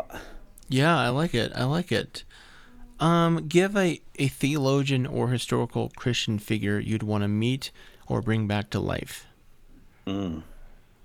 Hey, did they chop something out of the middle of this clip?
no; 0 cuts

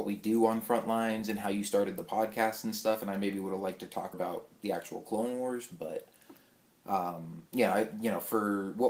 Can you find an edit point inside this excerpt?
yes; 2 cuts; at 4.1 s, 7.5 s

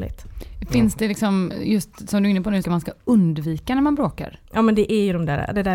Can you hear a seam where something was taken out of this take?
yes; 1 cut; at 2.6 s

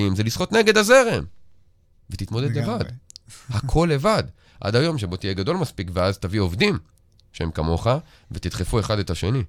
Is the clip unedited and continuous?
yes; 0 cuts

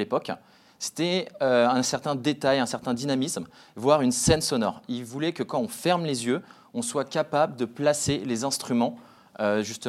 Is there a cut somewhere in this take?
no; 0 cuts

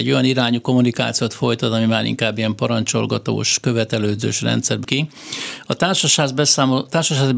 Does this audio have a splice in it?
yes; 1 cut; at 4.8 s

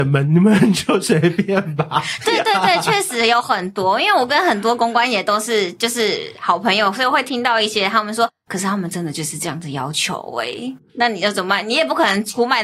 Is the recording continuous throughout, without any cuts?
yes; 0 cuts

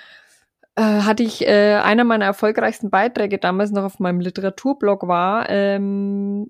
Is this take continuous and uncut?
yes; 0 cuts

